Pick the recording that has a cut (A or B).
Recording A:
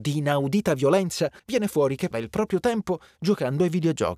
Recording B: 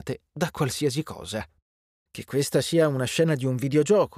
A